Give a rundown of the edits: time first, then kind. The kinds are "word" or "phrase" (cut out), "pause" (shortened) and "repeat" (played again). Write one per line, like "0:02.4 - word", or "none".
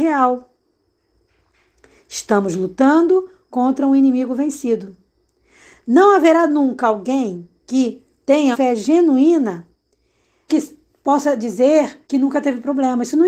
0:07.6 - pause
0:08.5 - word
0:10.5 - word
0:12.0 - pause